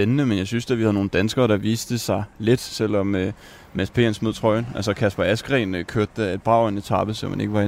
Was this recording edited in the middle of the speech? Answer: no; 0 cuts

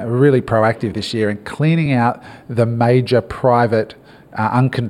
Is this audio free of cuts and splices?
yes; 0 cuts

